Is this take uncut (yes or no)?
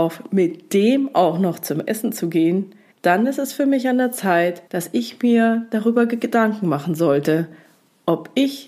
no